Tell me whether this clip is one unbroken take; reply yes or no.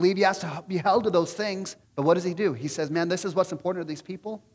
no